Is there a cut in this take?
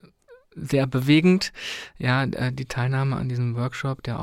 no; 0 cuts

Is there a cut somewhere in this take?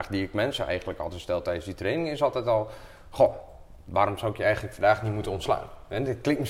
no; 0 cuts

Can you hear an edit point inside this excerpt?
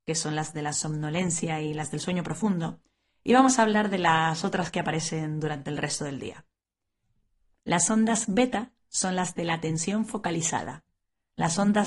no; 0 cuts

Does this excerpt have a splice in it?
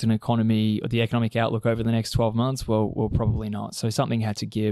no; 0 cuts

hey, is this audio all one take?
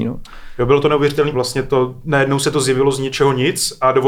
no; 1 cut; at 1.3 s

